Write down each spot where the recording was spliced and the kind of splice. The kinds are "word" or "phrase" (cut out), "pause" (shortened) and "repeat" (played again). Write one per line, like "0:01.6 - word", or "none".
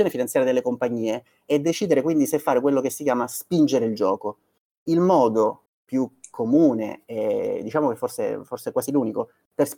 0:05.7 - pause